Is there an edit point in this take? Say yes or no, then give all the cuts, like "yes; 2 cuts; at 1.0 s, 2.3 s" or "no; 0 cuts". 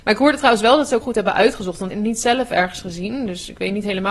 yes; 2 cuts; at 1.0 s, 1.9 s